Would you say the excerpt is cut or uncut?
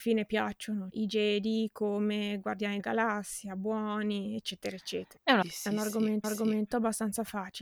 cut